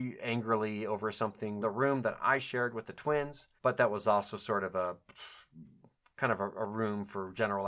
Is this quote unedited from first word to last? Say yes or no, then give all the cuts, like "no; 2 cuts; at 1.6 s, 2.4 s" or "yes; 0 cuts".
no; 2 cuts; at 1.6 s, 3.6 s